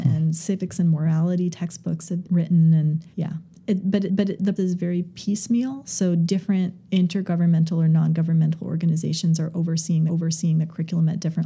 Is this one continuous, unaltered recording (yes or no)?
no